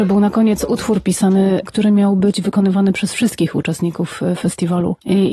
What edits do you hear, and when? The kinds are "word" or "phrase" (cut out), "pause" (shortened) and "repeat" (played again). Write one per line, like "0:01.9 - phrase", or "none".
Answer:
none

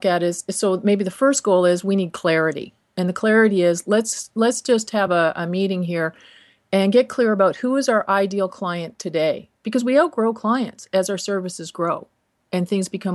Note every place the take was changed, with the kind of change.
none

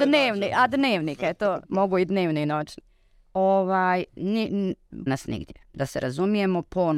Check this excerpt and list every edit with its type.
0:01.6 - pause
0:04.1 - word
0:05.1 - phrase

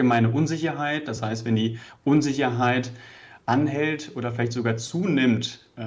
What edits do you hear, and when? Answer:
none

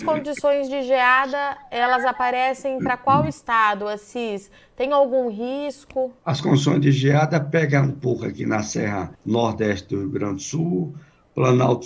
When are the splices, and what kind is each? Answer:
0:06.2 - pause
0:09.1 - pause

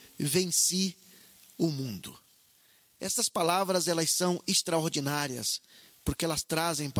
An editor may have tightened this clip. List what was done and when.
none

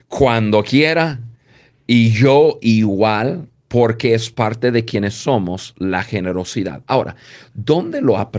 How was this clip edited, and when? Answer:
none

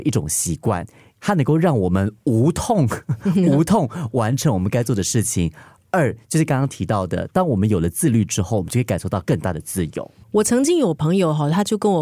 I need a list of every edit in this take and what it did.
0:01.2 - word

